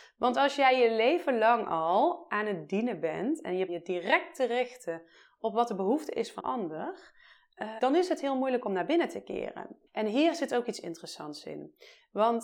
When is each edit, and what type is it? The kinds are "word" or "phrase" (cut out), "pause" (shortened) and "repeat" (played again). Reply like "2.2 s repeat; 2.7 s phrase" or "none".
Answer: 3.7 s phrase; 6.4 s word; 7.8 s word; 9.9 s pause